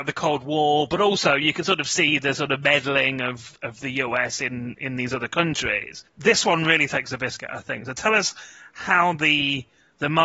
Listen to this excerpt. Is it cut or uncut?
uncut